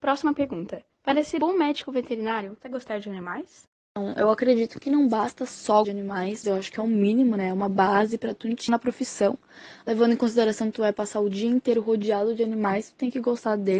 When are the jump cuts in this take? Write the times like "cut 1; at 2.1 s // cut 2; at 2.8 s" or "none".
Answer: cut 1; at 0.9 s // cut 2; at 1.4 s // cut 3; at 2.6 s // cut 4; at 5.8 s // cut 5; at 6.4 s // cut 6; at 8.7 s